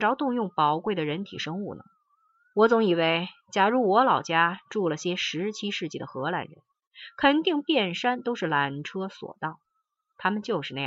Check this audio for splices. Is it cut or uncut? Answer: cut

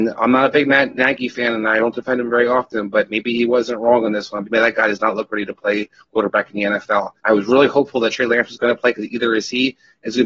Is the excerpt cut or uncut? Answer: cut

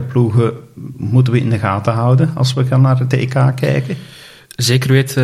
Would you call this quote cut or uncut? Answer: uncut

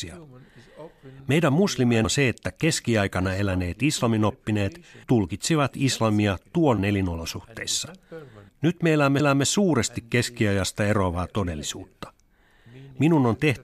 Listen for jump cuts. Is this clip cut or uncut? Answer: cut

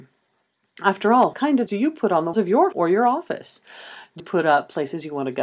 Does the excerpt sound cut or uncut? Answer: cut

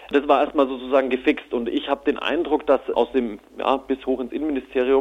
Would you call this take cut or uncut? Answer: cut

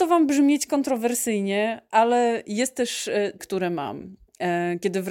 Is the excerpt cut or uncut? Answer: cut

